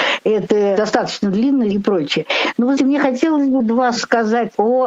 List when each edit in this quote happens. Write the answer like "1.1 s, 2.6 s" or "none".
1.7 s, 2.8 s, 3.6 s, 4.0 s